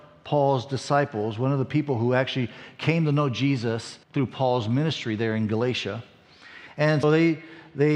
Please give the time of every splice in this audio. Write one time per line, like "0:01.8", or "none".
0:04.0
0:07.0